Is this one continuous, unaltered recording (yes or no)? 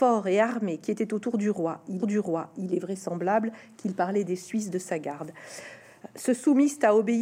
no